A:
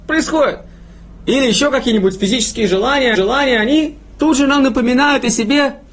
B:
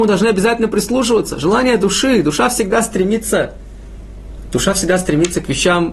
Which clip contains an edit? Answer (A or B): A